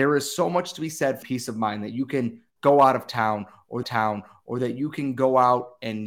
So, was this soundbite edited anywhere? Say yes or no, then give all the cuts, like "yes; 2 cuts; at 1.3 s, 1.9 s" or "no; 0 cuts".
yes; 2 cuts; at 1.2 s, 3.8 s